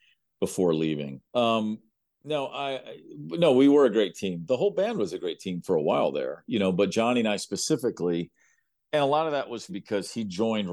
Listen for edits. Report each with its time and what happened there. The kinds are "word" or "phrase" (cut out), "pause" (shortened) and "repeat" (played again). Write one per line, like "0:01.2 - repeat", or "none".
0:01.3 - pause
0:09.7 - word